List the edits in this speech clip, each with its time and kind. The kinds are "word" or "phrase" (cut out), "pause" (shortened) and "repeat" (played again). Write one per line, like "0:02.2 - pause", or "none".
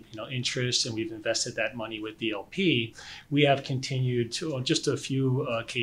none